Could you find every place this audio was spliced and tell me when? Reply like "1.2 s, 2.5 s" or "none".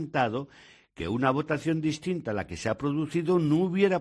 none